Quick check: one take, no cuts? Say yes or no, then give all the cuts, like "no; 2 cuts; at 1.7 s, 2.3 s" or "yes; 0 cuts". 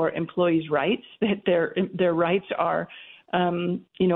yes; 0 cuts